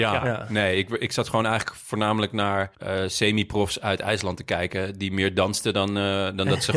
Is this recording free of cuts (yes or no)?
no